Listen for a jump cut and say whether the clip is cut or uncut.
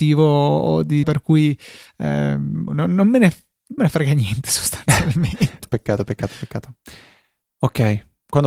cut